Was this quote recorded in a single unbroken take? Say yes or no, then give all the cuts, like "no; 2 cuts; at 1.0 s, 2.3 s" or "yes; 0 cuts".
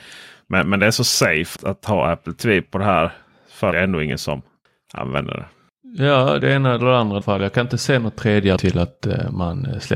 no; 5 cuts; at 1.6 s, 3.7 s, 6.4 s, 7.2 s, 8.6 s